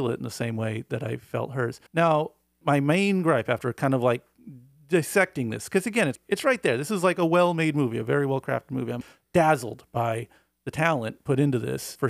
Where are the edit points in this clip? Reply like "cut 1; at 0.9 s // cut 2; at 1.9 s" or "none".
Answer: cut 1; at 1.9 s